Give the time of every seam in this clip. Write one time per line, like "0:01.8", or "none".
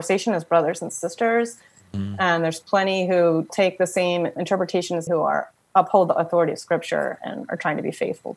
0:03.5
0:04.4
0:05.1